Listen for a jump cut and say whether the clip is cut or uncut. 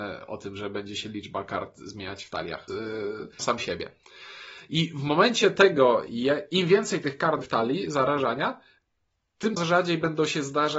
cut